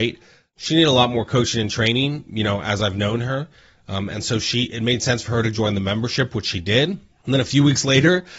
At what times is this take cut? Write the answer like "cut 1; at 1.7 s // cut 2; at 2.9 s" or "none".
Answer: none